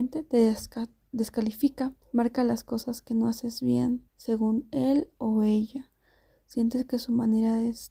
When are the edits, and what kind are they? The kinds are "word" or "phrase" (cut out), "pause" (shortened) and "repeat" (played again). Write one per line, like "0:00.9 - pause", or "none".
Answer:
0:02.0 - pause
0:04.1 - pause